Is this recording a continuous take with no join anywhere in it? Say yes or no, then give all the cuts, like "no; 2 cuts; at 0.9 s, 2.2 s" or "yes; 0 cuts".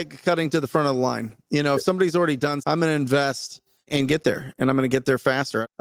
no; 1 cut; at 2.6 s